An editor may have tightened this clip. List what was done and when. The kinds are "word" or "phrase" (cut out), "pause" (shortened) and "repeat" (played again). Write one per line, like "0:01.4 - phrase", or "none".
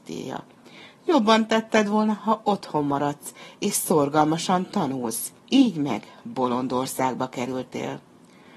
0:05.4 - pause